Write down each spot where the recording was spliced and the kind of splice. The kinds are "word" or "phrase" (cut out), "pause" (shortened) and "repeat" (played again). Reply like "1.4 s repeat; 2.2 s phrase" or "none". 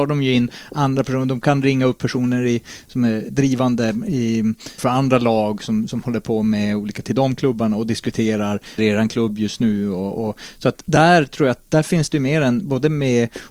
3.3 s word; 4.8 s word; 7.0 s phrase; 8.8 s phrase